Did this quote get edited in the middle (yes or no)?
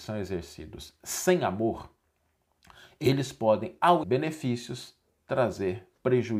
yes